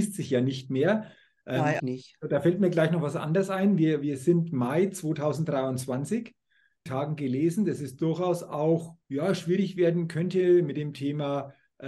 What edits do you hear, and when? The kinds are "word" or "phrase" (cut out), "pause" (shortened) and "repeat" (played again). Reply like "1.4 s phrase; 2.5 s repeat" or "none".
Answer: 1.8 s word; 6.9 s phrase; 9.0 s pause